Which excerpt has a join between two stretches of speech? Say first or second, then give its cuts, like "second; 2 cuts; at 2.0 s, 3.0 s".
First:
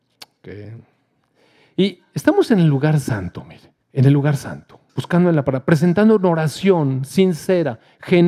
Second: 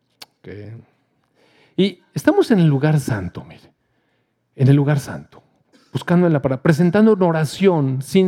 first; 2 cuts; at 3.8 s, 4.9 s